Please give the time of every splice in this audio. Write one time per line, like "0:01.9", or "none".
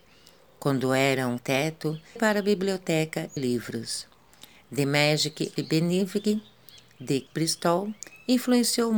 0:01.4
0:02.2
0:03.4
0:05.6
0:07.3